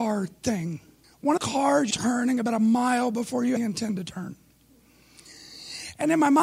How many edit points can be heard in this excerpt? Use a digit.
4